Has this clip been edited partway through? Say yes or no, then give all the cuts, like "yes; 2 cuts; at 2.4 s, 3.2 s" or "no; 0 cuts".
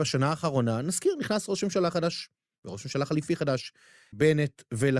no; 0 cuts